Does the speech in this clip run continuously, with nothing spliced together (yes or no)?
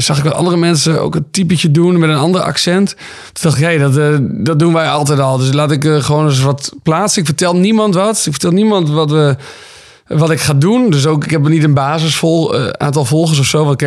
yes